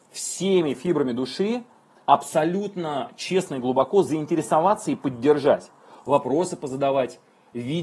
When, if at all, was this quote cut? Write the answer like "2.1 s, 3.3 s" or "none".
none

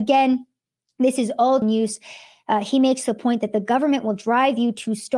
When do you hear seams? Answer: 1.6 s

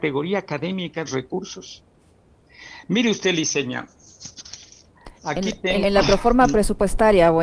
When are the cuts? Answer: 1.1 s, 5.2 s, 5.8 s

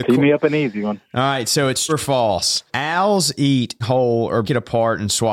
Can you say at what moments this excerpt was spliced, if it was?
1.9 s, 2.7 s, 3.8 s, 4.4 s

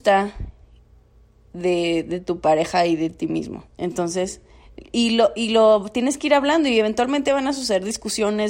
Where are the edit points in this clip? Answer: 3.7 s

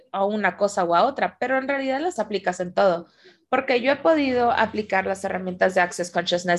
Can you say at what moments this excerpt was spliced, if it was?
2.2 s

